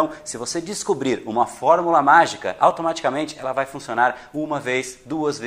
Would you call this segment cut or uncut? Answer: uncut